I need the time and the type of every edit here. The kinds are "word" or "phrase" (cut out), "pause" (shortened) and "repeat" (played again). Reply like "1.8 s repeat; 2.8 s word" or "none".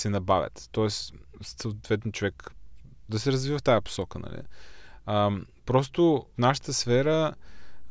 1.3 s word; 3.1 s word; 6.4 s phrase